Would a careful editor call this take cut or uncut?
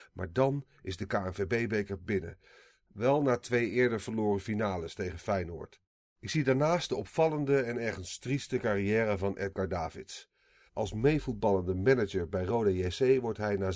uncut